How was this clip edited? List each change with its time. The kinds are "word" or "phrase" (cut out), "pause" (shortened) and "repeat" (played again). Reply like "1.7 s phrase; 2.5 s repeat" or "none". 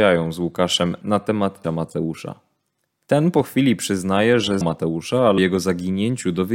1.0 s word; 1.6 s word; 4.6 s word; 5.4 s word